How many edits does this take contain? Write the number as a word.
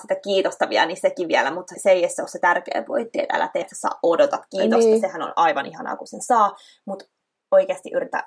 two